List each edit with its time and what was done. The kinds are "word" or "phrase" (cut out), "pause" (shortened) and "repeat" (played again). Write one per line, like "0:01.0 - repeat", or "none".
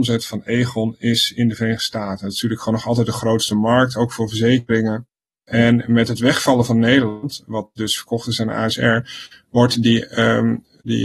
none